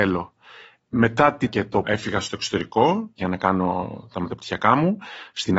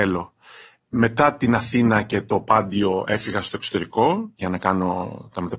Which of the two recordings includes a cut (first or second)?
first